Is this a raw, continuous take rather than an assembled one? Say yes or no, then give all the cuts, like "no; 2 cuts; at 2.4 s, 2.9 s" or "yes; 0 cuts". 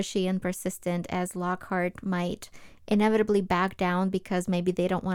yes; 0 cuts